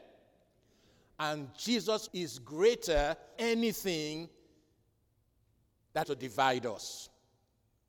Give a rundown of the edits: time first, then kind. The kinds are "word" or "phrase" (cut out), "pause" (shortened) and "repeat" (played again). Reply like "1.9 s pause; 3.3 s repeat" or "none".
2.1 s word; 3.4 s word; 6.0 s word

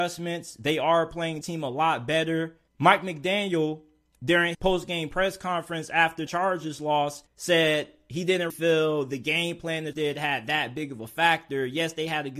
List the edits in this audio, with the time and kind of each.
1.4 s word; 2.7 s pause; 4.5 s word; 6.3 s word; 7.3 s pause; 8.5 s word; 9.9 s word

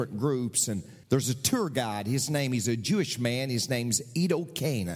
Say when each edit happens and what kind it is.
1.0 s pause

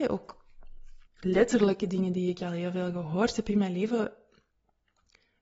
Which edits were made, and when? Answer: 1.1 s pause

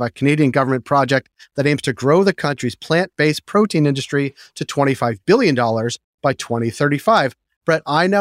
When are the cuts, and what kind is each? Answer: none

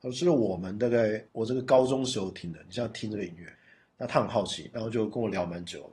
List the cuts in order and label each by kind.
1.3 s pause; 3.5 s pause

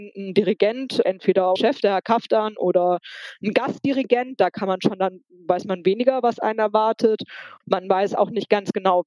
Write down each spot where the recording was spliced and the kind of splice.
1.6 s word

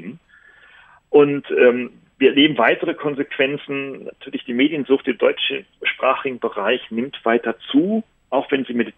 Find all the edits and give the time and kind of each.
none

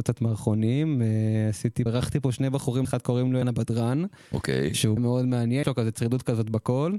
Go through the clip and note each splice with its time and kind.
1.9 s word; 2.8 s word; 3.4 s word; 5.0 s word; 5.6 s word

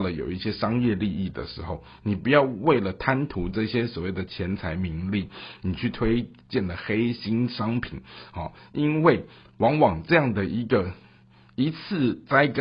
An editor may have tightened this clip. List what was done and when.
none

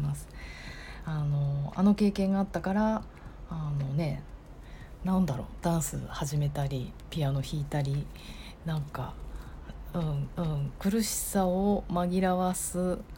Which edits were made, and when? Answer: 10.4 s repeat

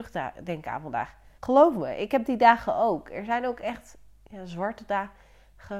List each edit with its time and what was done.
1.4 s pause

